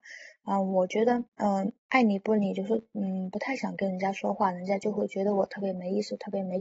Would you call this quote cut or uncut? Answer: cut